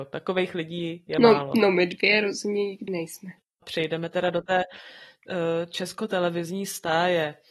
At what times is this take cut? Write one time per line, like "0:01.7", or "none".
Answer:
0:02.9